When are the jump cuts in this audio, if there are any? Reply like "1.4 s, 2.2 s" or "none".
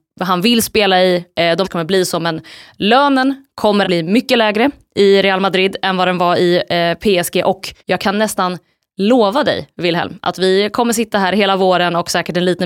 1.6 s, 3.8 s, 7.8 s